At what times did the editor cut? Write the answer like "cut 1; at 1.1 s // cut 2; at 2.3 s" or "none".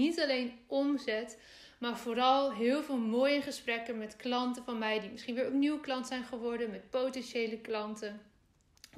none